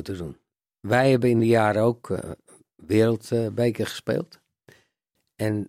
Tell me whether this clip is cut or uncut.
uncut